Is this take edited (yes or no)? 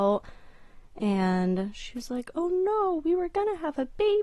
no